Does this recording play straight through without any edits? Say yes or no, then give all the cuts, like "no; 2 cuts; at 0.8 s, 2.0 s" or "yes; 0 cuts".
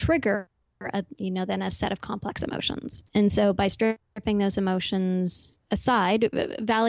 no; 2 cuts; at 3.1 s, 5.6 s